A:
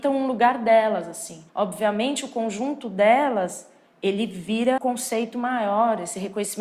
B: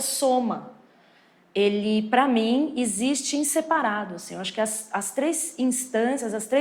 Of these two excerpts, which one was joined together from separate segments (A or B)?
A